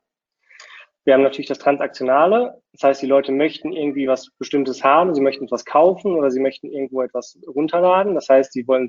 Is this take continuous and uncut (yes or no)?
yes